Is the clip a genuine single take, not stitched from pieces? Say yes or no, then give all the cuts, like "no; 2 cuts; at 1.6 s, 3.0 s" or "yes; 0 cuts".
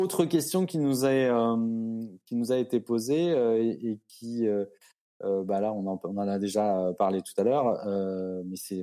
yes; 0 cuts